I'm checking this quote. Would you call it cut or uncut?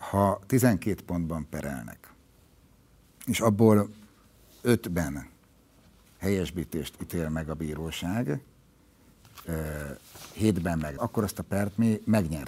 cut